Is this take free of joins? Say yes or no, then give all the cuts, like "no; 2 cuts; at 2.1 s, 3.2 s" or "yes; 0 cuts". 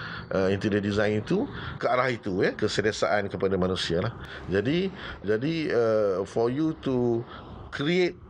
no; 3 cuts; at 1.8 s, 2.6 s, 5.2 s